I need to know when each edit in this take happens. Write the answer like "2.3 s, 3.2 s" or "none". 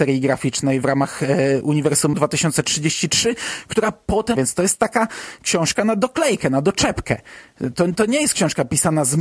2.1 s, 4.4 s